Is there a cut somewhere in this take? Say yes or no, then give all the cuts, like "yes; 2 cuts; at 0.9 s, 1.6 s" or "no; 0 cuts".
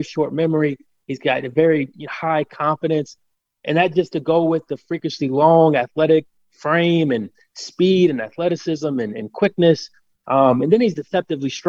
no; 0 cuts